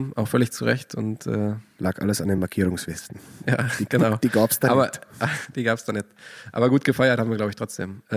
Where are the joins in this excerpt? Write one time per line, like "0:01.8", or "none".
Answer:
none